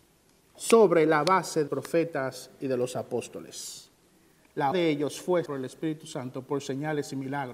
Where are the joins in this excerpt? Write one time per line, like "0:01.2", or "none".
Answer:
0:01.7
0:04.7
0:05.5